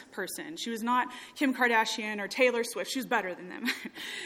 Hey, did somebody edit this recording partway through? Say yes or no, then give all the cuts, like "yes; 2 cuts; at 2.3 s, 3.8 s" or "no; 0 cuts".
no; 0 cuts